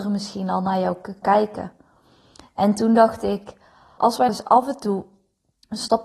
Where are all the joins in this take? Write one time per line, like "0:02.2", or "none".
0:01.2
0:04.0
0:04.3